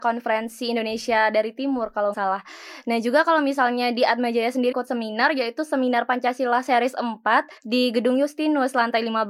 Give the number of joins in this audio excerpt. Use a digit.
3